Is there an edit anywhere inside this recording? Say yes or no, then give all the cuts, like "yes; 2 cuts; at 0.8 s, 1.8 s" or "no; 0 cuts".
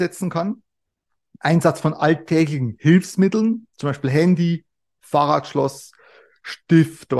no; 0 cuts